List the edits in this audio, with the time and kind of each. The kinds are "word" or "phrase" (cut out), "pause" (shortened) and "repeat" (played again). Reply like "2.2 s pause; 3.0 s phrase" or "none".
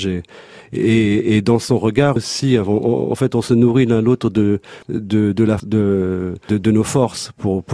2.2 s phrase; 4.8 s pause; 5.6 s word; 6.5 s word